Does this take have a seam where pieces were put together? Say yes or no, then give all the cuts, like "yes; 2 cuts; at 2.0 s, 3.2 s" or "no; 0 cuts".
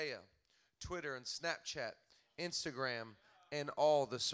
no; 0 cuts